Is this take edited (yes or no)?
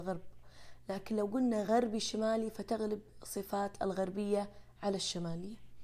no